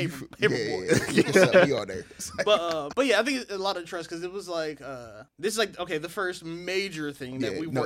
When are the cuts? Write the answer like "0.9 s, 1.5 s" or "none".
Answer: 2.9 s, 5.3 s